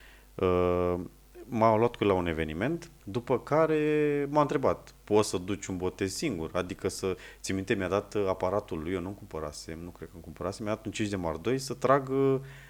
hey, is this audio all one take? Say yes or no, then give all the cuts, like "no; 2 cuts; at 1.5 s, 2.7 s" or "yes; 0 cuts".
no; 1 cut; at 3.0 s